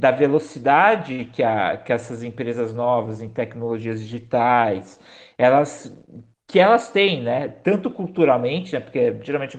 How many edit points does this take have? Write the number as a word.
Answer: zero